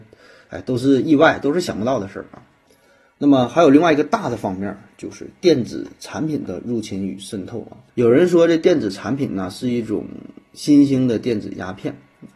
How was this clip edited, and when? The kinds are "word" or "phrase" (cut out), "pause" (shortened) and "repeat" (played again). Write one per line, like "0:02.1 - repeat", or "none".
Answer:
0:02.7 - pause
0:07.9 - pause